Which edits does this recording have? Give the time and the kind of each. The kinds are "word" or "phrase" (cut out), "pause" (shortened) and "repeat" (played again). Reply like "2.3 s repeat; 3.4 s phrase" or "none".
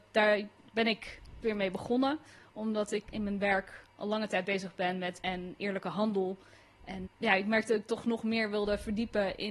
1.4 s word; 3.1 s word; 5.2 s word; 7.0 s word